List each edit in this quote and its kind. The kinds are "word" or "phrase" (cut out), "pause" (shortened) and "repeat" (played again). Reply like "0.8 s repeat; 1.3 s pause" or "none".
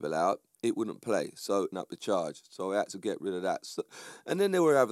1.7 s phrase

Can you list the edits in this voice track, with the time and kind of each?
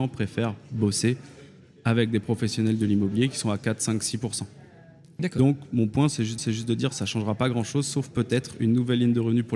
6.4 s repeat

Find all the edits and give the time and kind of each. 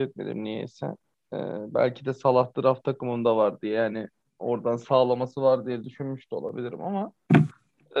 none

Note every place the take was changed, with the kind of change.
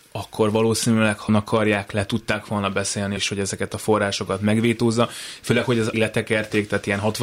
1.3 s word; 3.2 s word; 5.9 s phrase

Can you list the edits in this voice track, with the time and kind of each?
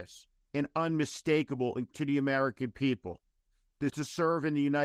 1.9 s word; 3.9 s word

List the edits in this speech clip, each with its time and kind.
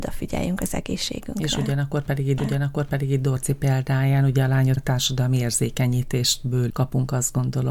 2.4 s repeat; 4.8 s word; 6.7 s word

